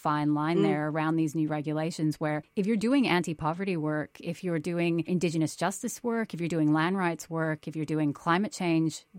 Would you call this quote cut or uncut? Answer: uncut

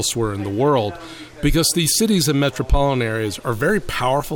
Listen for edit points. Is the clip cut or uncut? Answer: uncut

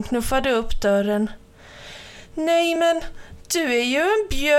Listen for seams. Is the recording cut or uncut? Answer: uncut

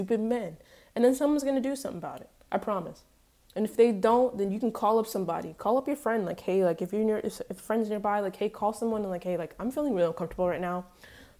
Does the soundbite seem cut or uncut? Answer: uncut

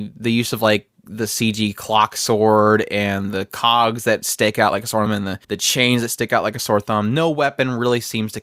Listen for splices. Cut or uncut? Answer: cut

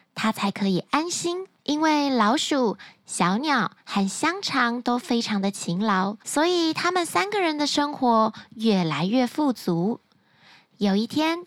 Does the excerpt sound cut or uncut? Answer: cut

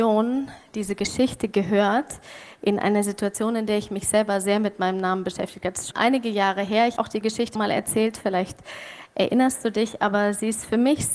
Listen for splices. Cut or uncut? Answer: cut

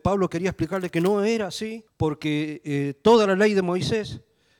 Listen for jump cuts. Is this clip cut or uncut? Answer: cut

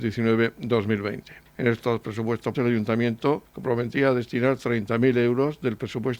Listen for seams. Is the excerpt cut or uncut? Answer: cut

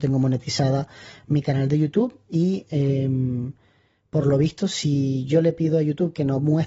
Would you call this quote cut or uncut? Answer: uncut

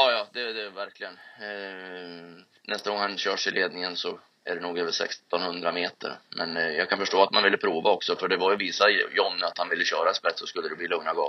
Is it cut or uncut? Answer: uncut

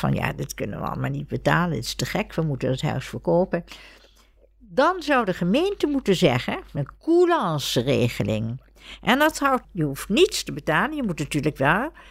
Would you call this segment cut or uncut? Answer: cut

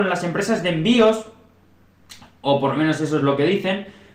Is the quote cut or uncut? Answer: uncut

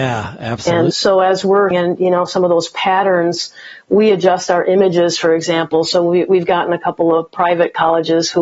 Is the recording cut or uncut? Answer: cut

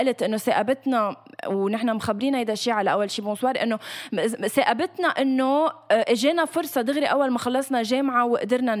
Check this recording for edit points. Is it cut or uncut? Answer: uncut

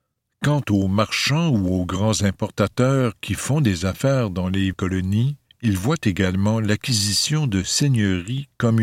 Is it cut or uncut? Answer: cut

